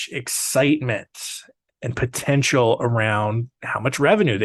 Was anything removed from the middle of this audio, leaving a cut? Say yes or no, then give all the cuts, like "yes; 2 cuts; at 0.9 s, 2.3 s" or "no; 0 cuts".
no; 0 cuts